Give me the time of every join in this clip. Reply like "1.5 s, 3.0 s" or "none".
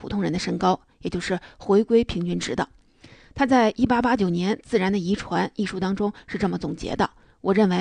none